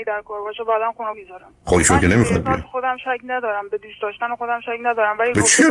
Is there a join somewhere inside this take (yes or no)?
yes